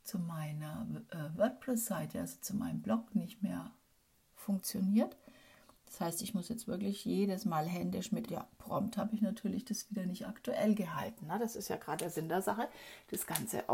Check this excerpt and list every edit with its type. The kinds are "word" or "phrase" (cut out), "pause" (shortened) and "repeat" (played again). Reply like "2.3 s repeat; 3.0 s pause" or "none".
8.3 s phrase